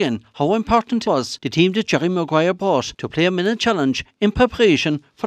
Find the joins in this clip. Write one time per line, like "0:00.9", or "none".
0:01.0